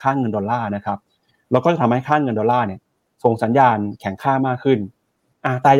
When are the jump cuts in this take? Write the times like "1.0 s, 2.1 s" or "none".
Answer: none